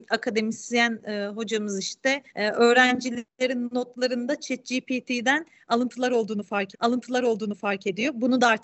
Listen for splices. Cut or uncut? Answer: cut